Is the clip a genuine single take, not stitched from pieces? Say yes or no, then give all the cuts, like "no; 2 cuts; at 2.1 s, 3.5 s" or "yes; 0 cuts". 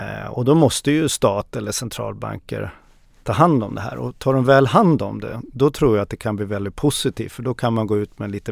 yes; 0 cuts